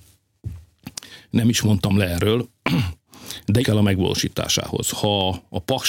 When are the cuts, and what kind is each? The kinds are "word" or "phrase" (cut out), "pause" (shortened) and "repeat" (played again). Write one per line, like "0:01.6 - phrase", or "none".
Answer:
0:03.6 - word

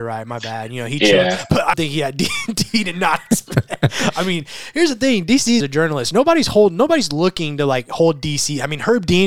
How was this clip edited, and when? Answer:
0:01.7 - word
0:05.6 - phrase

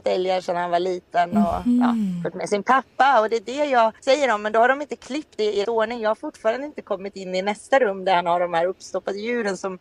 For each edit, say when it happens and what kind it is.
0:04.0 - pause
0:05.6 - word

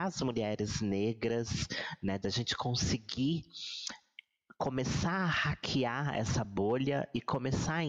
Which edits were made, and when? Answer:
none

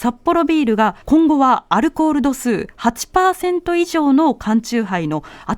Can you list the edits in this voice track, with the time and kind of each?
0:01.0 - pause

